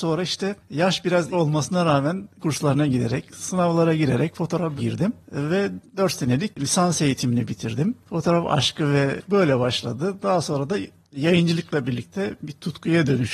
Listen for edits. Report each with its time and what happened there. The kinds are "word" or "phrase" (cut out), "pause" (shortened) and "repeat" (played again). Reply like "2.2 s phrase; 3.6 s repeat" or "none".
1.3 s word; 2.4 s word; 4.8 s word; 9.2 s word